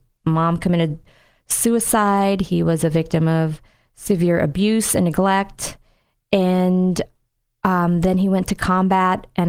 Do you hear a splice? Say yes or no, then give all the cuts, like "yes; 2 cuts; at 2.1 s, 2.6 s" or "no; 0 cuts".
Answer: no; 0 cuts